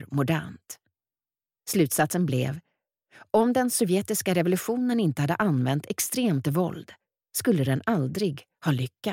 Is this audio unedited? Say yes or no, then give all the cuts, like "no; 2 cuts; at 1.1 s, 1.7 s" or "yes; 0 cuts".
yes; 0 cuts